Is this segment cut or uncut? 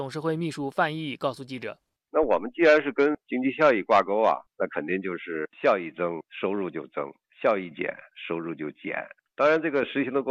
uncut